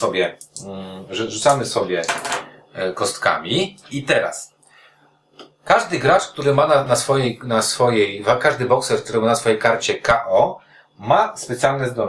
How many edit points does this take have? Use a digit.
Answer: 1